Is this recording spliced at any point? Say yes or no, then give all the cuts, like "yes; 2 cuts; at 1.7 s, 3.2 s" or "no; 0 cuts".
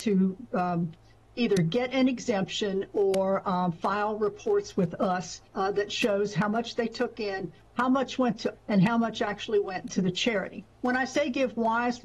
yes; 3 cuts; at 5.5 s, 8.6 s, 10.7 s